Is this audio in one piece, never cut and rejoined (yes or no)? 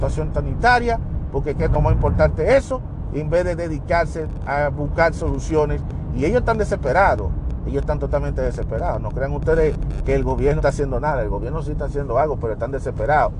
no